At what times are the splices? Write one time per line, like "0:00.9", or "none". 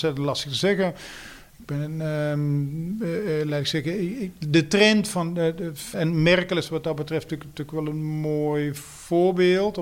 0:05.9